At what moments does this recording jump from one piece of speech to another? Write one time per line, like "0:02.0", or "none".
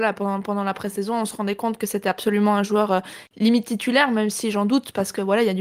none